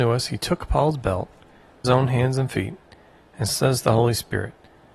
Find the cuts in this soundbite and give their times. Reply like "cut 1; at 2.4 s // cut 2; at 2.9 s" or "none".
cut 1; at 1.8 s // cut 2; at 3.5 s